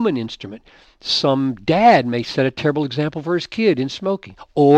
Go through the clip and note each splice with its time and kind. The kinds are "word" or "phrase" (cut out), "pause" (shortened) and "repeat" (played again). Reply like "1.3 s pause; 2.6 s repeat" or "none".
none